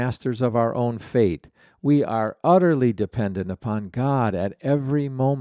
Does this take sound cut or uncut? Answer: uncut